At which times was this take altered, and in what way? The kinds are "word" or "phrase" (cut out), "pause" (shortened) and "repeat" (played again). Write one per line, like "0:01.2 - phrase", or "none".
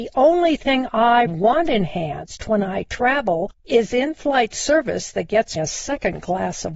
0:01.3 - word
0:05.6 - word